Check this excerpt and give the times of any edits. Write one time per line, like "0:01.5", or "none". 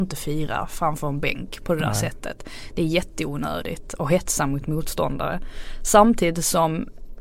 none